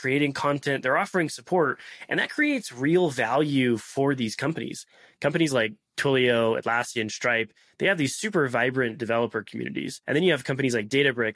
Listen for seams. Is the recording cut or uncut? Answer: cut